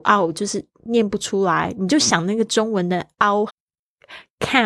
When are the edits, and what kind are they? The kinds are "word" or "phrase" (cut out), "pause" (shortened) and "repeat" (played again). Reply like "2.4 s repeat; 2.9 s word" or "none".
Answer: 3.5 s phrase